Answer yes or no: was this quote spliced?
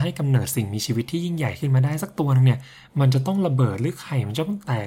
no